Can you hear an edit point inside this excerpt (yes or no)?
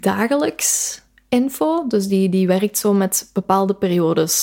no